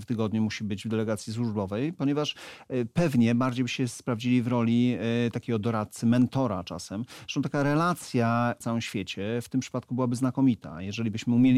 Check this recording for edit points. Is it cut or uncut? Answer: cut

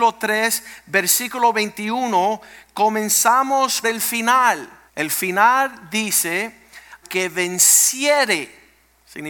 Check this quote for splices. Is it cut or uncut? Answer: cut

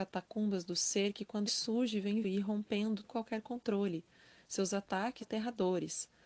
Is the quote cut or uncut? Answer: cut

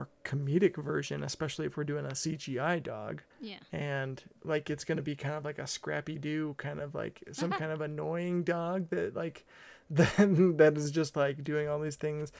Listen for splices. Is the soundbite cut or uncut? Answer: cut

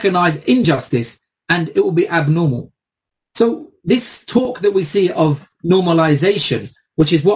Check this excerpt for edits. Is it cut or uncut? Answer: uncut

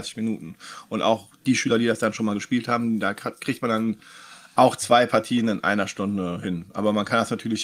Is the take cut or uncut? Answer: uncut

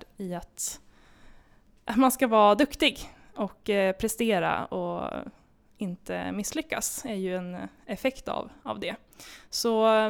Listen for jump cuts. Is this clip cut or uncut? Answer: uncut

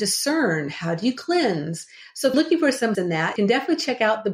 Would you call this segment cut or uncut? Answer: cut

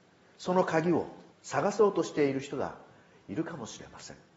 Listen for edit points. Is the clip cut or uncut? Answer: cut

